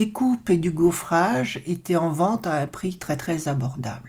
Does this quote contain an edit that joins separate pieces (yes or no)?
no